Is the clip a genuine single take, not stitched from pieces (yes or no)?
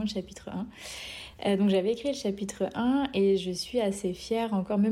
yes